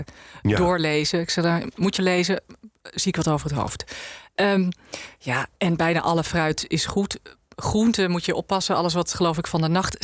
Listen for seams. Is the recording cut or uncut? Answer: cut